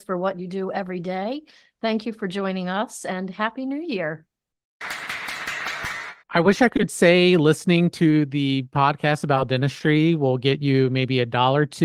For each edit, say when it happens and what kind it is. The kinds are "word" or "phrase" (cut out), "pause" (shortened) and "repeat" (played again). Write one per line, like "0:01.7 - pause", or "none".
0:06.2 - pause